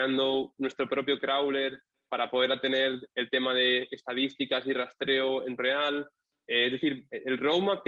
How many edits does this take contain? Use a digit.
1